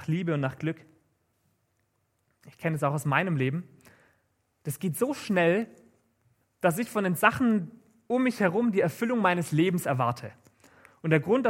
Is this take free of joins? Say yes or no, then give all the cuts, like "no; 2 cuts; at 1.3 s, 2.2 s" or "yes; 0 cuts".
yes; 0 cuts